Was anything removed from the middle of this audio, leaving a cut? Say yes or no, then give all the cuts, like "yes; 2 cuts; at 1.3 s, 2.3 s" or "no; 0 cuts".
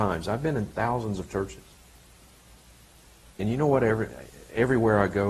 no; 0 cuts